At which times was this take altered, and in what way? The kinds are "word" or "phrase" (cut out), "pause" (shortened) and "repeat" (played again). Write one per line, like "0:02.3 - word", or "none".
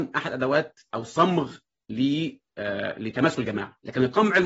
none

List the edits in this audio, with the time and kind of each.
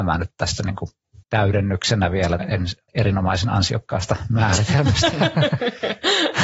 0:01.2 - pause
0:02.4 - word
0:02.9 - pause

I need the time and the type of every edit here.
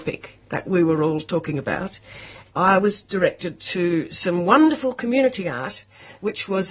none

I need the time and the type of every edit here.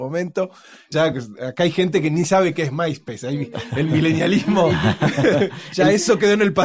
none

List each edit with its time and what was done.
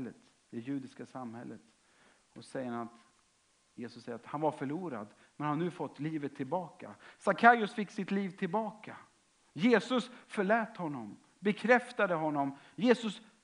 none

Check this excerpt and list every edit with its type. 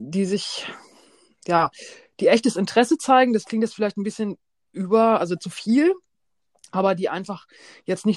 none

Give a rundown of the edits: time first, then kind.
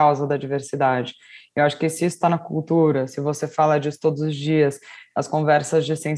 none

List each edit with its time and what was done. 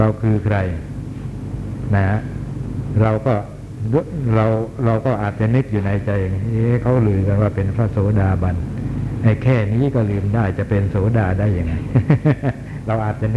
none

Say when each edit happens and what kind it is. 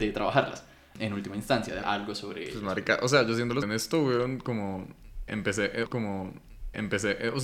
0:01.8 - word
0:03.6 - word
0:05.8 - repeat

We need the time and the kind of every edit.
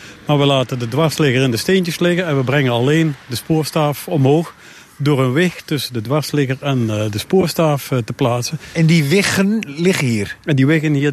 none

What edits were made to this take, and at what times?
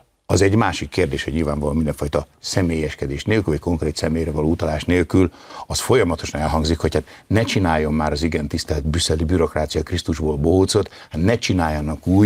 none

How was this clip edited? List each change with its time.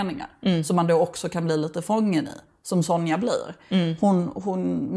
none

